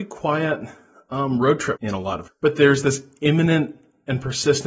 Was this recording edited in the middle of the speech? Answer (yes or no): yes